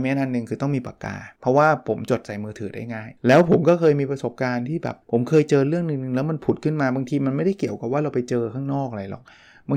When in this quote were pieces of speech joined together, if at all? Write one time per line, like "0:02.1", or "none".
0:01.3
0:03.2
0:05.0